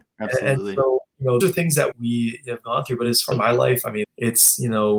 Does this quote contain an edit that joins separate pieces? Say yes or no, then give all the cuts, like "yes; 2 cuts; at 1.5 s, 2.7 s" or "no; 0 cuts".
yes; 4 cuts; at 1.4 s, 1.9 s, 3.3 s, 4.0 s